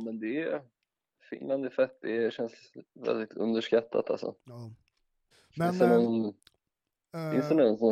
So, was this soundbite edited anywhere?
yes; 1 cut; at 5.3 s

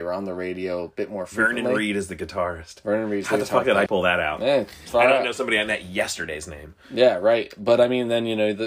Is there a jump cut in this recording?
yes; 1 cut; at 3.9 s

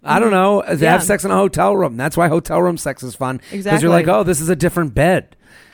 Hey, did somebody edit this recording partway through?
no; 0 cuts

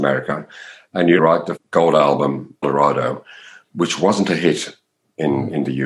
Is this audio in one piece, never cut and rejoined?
no; 3 cuts; at 1.2 s, 1.6 s, 2.6 s

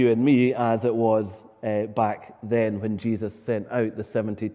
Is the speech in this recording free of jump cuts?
yes; 0 cuts

